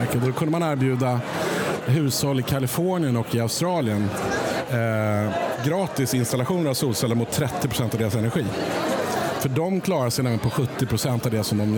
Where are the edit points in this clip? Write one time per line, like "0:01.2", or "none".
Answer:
none